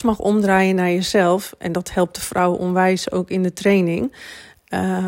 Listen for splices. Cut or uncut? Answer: uncut